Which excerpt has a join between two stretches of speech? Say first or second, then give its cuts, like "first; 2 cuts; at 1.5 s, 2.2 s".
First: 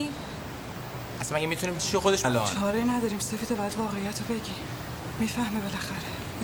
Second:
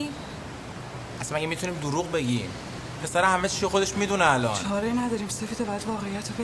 first; 2 cuts; at 1.8 s, 2.2 s